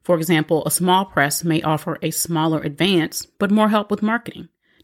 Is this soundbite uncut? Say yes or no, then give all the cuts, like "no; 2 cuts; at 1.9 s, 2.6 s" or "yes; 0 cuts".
no; 1 cut; at 3.3 s